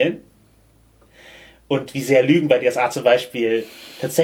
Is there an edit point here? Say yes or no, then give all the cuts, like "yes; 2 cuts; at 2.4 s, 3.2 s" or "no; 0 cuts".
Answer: no; 0 cuts